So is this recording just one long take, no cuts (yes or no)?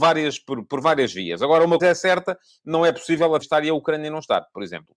no